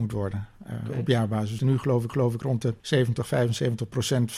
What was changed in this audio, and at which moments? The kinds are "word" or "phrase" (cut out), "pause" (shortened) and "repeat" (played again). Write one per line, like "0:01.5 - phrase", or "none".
0:01.6 - word
0:02.1 - repeat
0:02.8 - pause